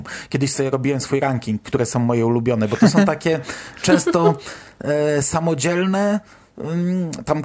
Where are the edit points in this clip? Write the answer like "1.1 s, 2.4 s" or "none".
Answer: none